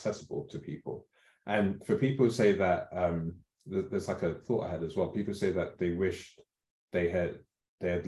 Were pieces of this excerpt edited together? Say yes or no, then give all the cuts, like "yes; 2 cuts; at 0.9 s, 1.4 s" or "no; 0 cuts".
no; 0 cuts